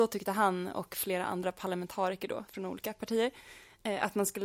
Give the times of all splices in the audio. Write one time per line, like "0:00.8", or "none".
none